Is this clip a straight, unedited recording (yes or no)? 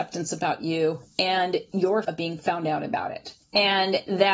no